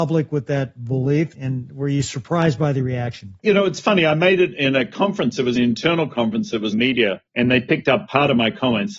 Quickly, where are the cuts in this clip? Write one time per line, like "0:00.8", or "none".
0:01.3
0:03.4
0:05.6
0:06.7
0:07.3